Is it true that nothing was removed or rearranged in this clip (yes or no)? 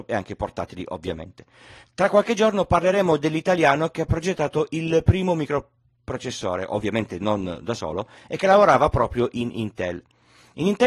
yes